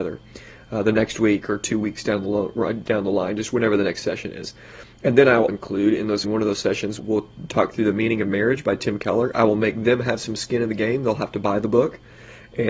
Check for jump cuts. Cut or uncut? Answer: cut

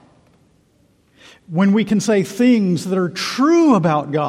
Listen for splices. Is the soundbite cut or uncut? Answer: uncut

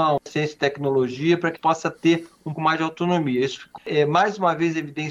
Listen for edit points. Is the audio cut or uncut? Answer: cut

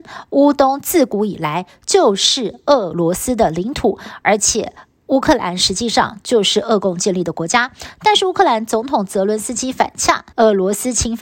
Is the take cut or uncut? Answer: cut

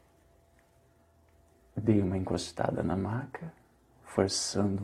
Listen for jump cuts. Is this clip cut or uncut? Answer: uncut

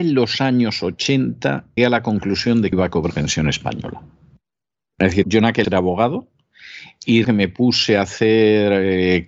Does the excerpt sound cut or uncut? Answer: cut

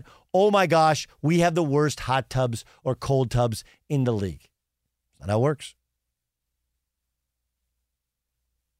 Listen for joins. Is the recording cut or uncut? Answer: uncut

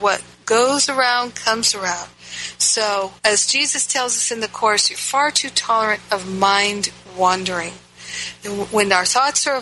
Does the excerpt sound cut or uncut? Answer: cut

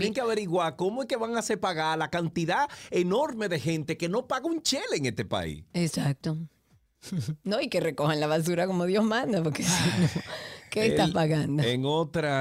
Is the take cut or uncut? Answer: uncut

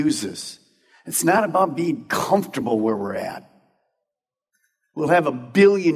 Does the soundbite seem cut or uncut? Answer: uncut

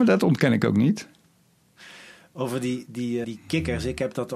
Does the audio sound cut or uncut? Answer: cut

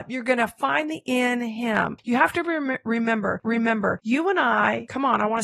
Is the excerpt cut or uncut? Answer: cut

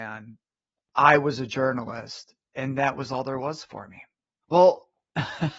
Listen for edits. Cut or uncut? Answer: uncut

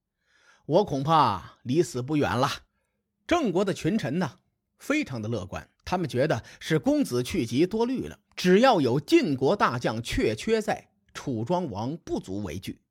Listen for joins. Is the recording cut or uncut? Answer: cut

